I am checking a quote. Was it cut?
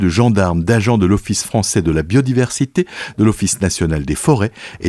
no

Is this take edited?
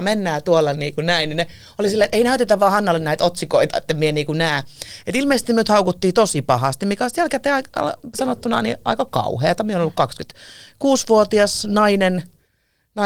no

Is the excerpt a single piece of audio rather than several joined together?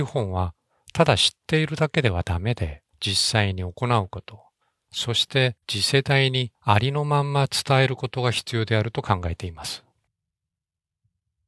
no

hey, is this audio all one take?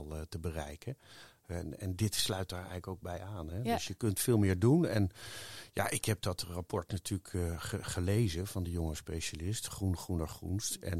yes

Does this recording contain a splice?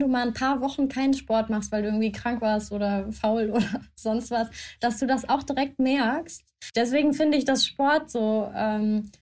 no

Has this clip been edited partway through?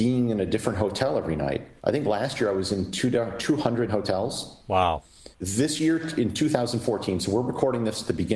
yes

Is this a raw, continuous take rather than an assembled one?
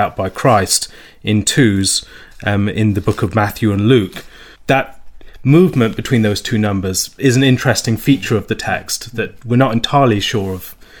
no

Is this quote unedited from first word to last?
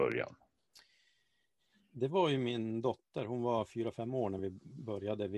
yes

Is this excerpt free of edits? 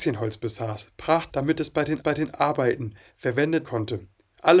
no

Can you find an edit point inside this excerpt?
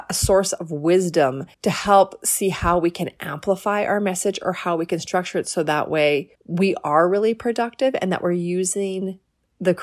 yes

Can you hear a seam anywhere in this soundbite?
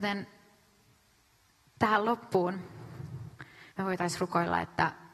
yes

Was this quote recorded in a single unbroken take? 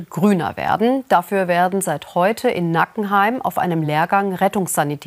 yes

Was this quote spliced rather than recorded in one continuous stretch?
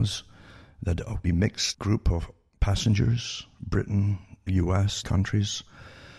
yes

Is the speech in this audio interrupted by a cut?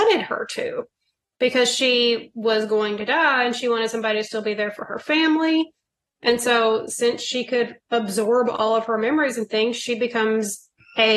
no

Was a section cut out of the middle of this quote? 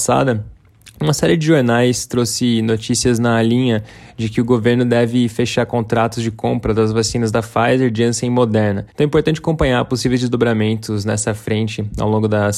yes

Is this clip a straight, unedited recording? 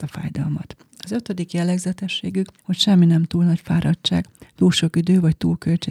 no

